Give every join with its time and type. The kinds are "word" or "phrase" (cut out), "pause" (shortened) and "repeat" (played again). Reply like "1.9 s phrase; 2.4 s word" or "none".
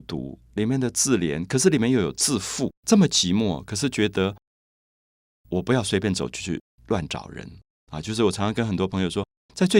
2.8 s pause